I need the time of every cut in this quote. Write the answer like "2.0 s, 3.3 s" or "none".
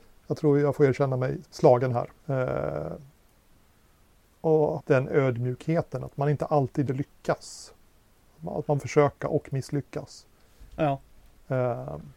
2.2 s, 4.8 s, 6.9 s, 8.8 s